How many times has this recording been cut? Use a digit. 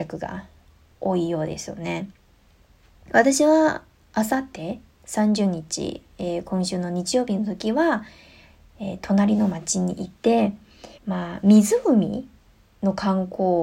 1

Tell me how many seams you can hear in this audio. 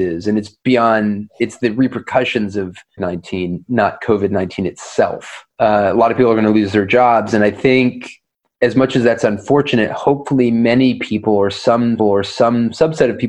3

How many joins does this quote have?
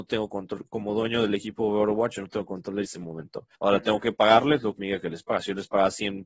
3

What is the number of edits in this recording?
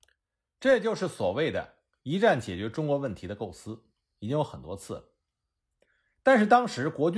0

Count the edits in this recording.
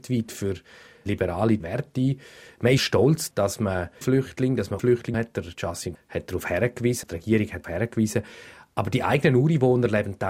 9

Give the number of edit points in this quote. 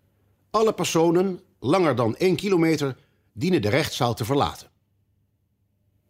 0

